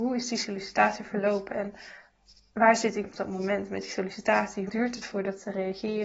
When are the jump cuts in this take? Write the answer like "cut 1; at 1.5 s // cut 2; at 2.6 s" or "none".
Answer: cut 1; at 3.0 s // cut 2; at 4.7 s